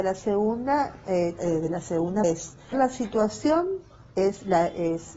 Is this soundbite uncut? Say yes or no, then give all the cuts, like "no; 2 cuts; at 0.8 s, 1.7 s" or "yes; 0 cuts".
no; 3 cuts; at 1.4 s, 2.2 s, 2.7 s